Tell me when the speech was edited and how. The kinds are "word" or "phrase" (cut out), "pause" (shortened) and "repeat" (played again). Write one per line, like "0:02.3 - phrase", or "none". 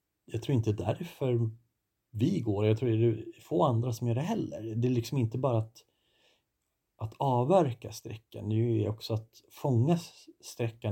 none

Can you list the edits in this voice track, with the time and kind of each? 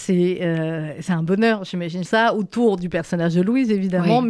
0:02.1 - phrase

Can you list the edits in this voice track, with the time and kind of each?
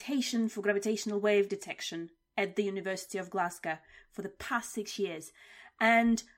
none

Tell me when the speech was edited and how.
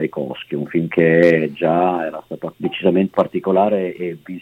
0:02.5 - phrase
0:03.1 - word

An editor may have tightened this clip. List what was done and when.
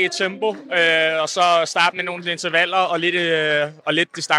none

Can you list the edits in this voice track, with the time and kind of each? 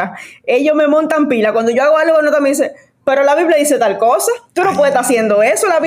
none

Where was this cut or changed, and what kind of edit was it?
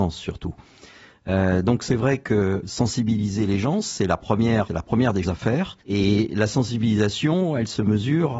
0:02.6 - word
0:04.7 - word
0:05.2 - word
0:05.8 - pause

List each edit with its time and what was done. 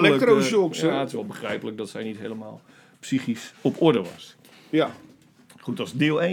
none

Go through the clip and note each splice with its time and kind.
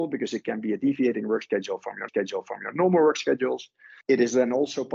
0:02.1 - repeat
0:04.0 - pause

